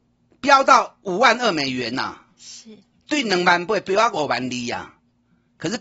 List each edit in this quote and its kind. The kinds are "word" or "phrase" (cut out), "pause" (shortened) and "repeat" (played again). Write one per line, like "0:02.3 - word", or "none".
none